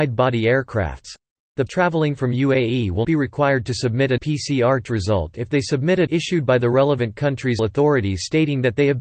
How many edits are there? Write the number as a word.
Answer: six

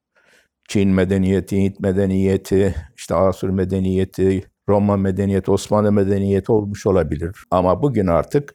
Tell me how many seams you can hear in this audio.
two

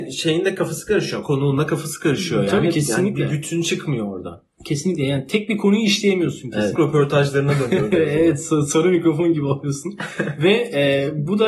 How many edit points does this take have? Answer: one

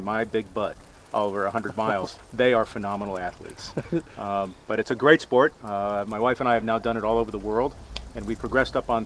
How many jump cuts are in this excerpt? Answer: zero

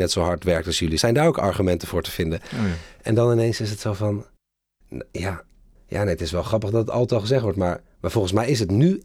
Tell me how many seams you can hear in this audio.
one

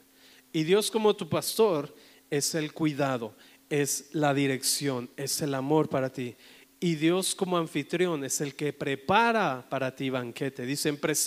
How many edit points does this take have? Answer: zero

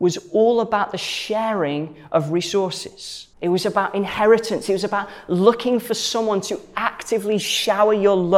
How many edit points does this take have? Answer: one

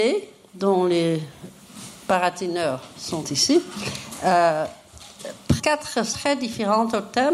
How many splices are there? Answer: three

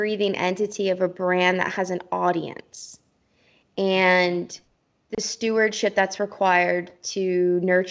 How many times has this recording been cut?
zero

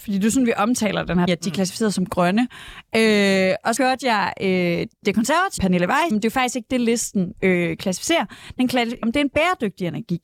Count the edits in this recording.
six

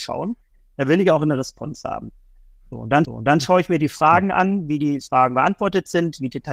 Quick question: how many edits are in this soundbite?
one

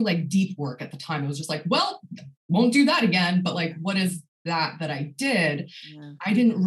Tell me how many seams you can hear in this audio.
zero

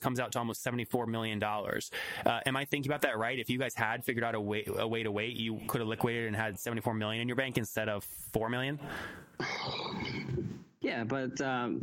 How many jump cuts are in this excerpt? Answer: one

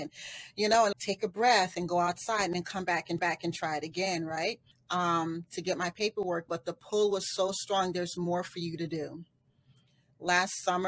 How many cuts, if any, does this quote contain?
four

